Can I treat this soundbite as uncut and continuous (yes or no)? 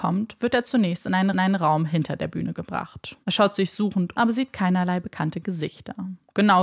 no